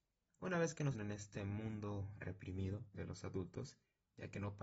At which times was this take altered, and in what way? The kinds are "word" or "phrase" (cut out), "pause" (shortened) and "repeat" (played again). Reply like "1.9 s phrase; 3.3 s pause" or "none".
0.9 s word; 2.9 s phrase